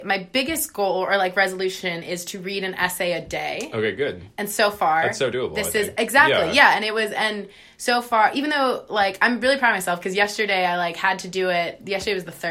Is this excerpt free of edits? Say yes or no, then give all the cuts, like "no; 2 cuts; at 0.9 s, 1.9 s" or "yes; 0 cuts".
yes; 0 cuts